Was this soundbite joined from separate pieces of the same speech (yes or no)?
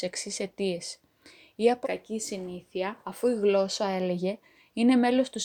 yes